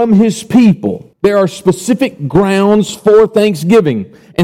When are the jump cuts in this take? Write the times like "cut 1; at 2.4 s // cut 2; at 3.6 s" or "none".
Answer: cut 1; at 1.1 s